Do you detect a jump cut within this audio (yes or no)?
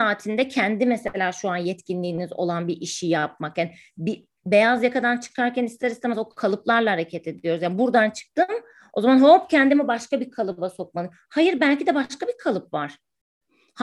no